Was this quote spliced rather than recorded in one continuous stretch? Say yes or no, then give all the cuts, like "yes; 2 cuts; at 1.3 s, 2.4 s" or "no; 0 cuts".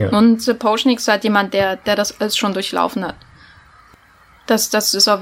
no; 0 cuts